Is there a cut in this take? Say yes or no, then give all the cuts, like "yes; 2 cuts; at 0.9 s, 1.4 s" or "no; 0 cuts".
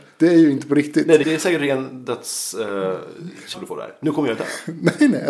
yes; 2 cuts; at 1.2 s, 3.5 s